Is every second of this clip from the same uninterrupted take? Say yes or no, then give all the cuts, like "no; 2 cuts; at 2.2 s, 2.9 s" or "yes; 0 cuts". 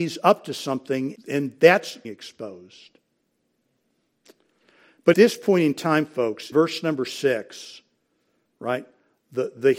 no; 4 cuts; at 1.1 s, 2.0 s, 5.1 s, 6.5 s